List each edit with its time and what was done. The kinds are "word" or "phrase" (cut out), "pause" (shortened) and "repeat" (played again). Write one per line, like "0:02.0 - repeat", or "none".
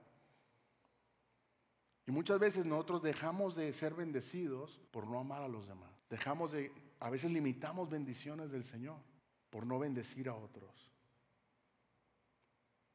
0:04.9 - pause
0:06.0 - pause
0:09.2 - pause